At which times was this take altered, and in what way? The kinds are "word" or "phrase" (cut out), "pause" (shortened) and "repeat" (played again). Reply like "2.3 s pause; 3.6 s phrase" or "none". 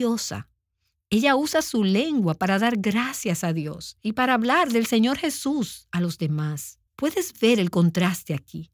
6.9 s pause